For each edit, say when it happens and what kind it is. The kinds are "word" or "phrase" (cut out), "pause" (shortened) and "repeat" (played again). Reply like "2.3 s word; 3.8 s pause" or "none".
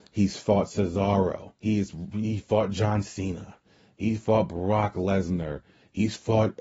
1.6 s pause